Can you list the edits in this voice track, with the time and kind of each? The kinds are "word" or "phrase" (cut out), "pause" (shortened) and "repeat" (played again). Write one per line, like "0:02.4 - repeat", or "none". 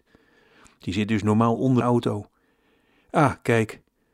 0:01.8 - word

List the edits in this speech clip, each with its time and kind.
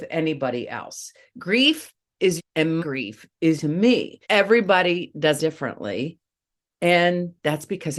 0:02.4 - phrase
0:02.8 - word
0:03.6 - word
0:04.2 - pause
0:05.4 - word

